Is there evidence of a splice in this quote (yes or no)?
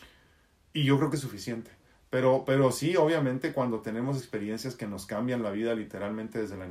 yes